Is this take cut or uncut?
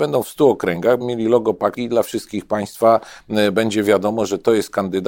cut